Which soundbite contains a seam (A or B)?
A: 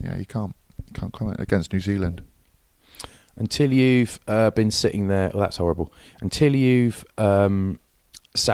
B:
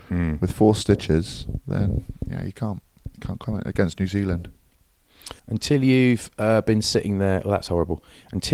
B